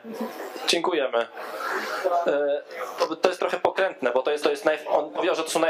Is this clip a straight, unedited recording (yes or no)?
no